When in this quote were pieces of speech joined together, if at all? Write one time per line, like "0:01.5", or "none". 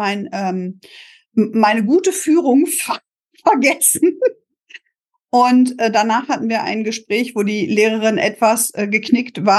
none